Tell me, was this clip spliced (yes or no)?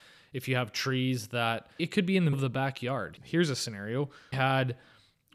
yes